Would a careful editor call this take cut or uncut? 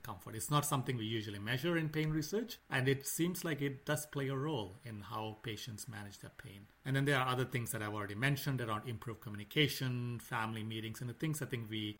uncut